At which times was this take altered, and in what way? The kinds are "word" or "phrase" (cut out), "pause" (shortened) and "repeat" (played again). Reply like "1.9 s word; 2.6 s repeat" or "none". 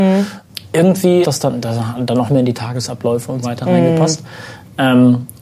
1.2 s phrase; 2.3 s word; 3.4 s word